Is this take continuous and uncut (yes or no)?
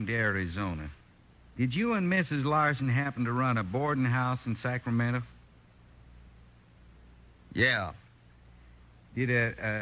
yes